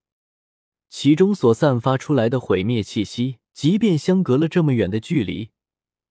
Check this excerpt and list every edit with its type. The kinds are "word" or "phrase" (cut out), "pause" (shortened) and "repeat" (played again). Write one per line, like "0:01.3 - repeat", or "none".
0:03.5 - pause